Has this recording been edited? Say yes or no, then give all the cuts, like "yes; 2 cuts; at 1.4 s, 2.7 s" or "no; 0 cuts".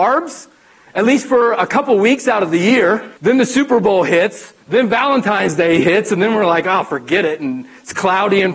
yes; 2 cuts; at 3.2 s, 4.6 s